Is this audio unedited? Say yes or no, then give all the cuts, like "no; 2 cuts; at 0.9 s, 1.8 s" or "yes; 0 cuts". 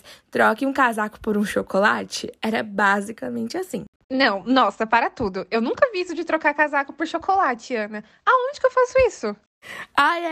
yes; 0 cuts